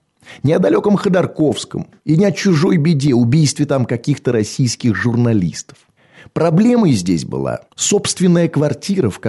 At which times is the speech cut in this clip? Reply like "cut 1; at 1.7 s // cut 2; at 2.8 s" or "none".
cut 1; at 2.0 s // cut 2; at 6.0 s // cut 3; at 7.7 s

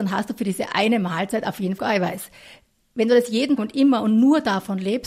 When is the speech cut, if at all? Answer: cut 1; at 1.8 s // cut 2; at 3.6 s

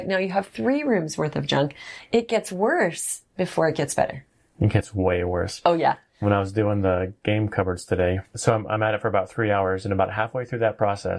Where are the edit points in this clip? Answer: none

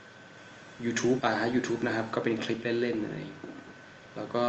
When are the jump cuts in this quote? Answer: cut 1; at 1.2 s

